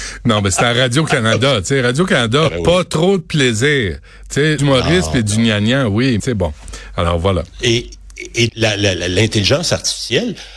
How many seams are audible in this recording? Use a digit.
4